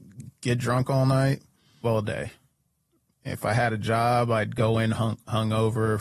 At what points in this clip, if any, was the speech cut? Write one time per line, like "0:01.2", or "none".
0:01.8